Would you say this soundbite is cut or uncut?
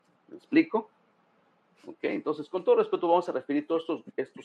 uncut